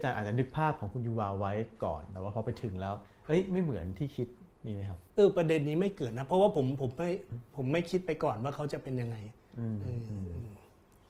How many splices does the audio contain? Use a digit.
1